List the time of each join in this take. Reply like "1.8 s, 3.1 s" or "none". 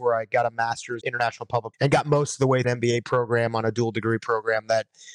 1.0 s, 1.7 s, 2.6 s